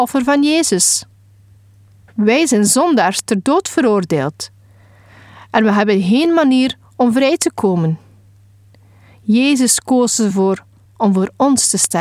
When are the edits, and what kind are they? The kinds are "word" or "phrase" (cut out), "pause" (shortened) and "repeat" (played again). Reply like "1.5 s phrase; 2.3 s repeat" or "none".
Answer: none